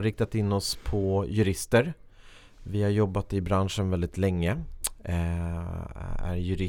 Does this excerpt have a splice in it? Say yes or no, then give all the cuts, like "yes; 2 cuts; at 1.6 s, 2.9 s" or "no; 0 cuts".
no; 0 cuts